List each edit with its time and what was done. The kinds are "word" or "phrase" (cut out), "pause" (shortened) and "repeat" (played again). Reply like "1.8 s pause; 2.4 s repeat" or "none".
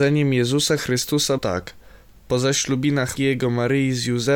1.4 s word; 3.2 s word